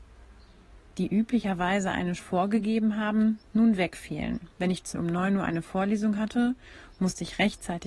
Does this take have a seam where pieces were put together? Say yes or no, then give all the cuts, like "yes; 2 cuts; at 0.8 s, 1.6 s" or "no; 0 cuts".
yes; 3 cuts; at 2.2 s, 4.5 s, 4.9 s